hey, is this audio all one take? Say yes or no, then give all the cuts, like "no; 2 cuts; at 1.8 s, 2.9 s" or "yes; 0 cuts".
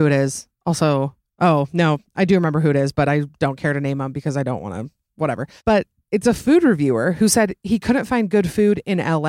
no; 1 cut; at 5.6 s